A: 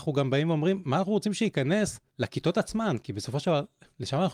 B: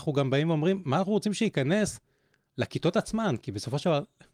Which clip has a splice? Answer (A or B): A